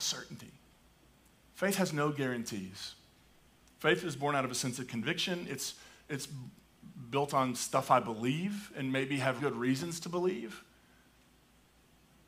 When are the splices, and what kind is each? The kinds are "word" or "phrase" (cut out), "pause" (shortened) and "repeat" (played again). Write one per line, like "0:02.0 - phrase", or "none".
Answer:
0:09.4 - word